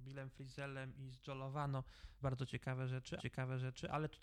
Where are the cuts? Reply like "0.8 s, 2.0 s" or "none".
2.2 s, 3.2 s